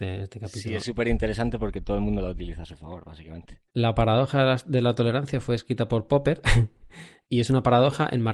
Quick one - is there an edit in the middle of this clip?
yes; 2 cuts; at 3.7 s, 7.3 s

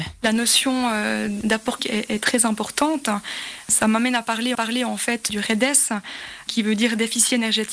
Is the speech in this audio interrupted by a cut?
yes; 2 cuts; at 1.8 s, 4.5 s

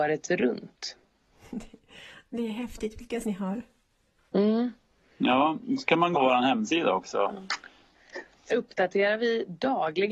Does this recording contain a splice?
yes; 3 cuts; at 3.2 s, 6.1 s, 8.5 s

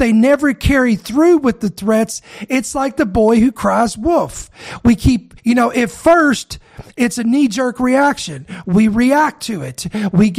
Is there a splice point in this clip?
yes; 1 cut; at 5.4 s

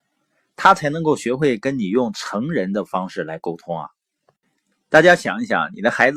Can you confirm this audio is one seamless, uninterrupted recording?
yes; 0 cuts

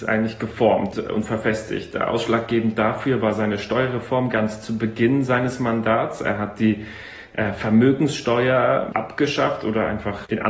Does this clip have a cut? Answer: yes; 1 cut; at 0.9 s

